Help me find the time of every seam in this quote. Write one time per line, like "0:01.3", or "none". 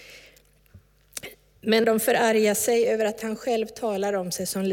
0:01.8